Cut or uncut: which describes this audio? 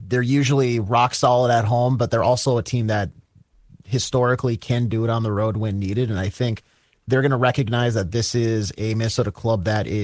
uncut